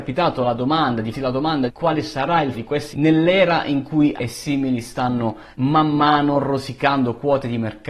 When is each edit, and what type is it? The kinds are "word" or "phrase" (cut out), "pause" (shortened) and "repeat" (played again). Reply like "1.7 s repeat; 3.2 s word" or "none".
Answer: 1.1 s word; 1.7 s word; 2.5 s word; 2.9 s word; 4.2 s word; 5.5 s pause